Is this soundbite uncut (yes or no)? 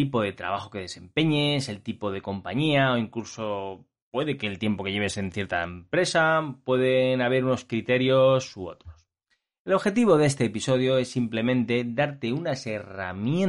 yes